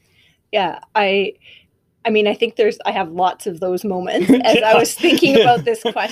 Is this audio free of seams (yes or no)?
yes